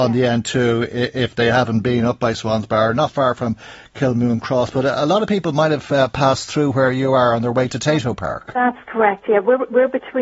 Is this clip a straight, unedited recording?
yes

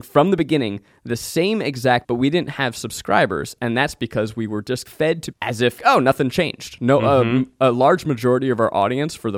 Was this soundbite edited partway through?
yes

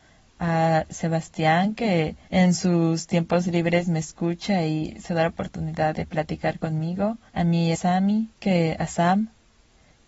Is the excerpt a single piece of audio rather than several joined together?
no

